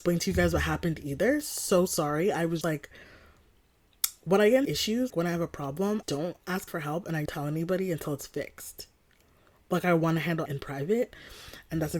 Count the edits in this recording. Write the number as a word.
seven